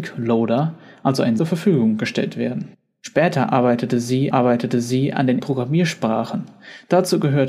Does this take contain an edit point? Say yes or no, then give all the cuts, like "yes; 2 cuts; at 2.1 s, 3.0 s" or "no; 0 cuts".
yes; 3 cuts; at 1.4 s, 4.3 s, 5.4 s